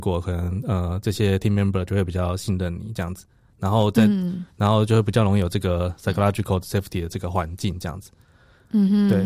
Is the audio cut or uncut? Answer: uncut